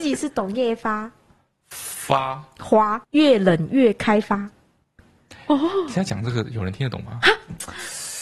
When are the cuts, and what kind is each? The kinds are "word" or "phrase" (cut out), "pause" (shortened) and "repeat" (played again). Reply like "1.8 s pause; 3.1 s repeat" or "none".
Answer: 3.0 s phrase